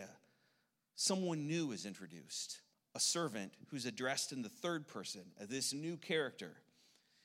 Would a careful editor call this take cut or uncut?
cut